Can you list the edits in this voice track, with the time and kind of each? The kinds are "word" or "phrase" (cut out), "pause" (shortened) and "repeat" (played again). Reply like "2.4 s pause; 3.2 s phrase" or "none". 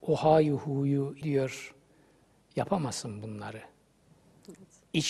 1.2 s word